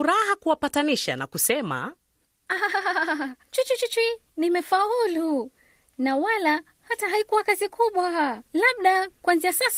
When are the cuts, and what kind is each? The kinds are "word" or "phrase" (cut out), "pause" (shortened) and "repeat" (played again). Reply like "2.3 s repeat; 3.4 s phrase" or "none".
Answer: 3.4 s pause; 4.3 s pause; 8.5 s pause